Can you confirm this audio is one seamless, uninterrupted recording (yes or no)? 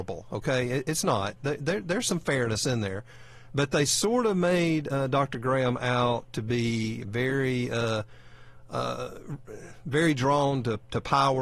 yes